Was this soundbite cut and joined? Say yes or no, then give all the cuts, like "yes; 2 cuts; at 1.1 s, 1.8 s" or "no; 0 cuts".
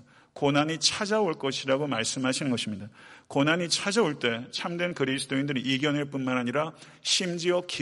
no; 0 cuts